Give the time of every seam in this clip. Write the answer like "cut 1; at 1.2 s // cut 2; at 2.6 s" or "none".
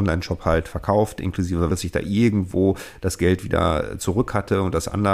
cut 1; at 1.7 s